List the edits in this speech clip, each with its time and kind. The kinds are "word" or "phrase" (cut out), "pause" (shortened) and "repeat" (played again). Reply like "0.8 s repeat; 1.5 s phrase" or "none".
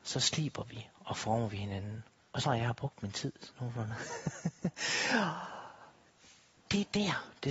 2.4 s word